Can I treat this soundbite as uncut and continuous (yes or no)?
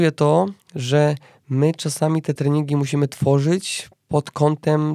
yes